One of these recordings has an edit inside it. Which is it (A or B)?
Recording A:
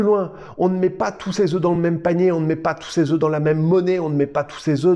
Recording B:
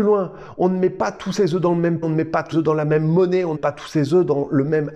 B